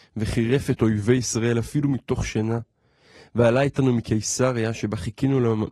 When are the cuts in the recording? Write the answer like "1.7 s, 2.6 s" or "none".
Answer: none